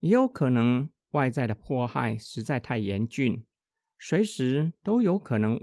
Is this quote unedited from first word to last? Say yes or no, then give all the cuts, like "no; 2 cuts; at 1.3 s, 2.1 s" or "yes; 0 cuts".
yes; 0 cuts